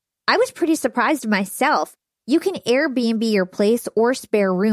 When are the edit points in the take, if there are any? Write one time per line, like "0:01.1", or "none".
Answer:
none

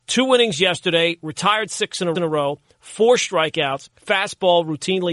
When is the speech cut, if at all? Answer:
0:02.1
0:03.9

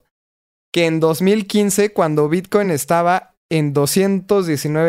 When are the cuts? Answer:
none

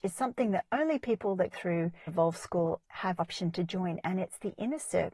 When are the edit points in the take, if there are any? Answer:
0:01.5
0:02.1
0:02.8
0:03.2

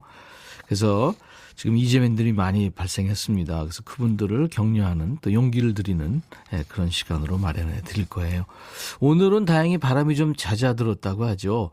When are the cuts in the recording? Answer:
none

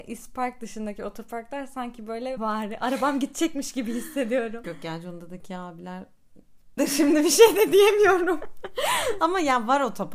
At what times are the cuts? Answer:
0:02.4
0:04.6
0:06.8

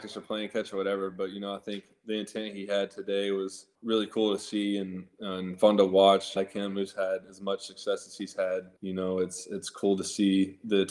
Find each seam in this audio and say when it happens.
0:03.7
0:06.4
0:08.8

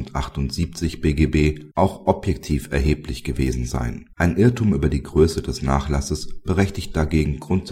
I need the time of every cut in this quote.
0:01.7
0:04.1

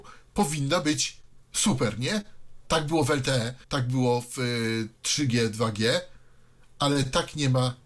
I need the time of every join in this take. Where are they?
0:01.4
0:03.6

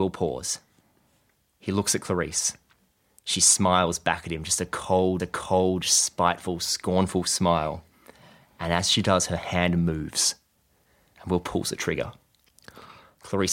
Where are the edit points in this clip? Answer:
0:05.2

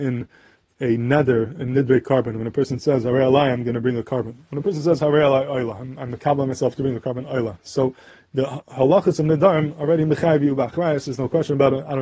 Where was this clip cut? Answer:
none

